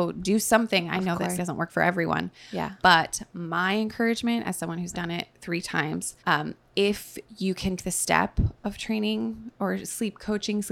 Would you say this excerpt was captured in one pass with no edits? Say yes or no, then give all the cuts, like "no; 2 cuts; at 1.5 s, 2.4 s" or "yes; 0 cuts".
no; 5 cuts; at 1.4 s, 4.9 s, 6.2 s, 7.8 s, 8.6 s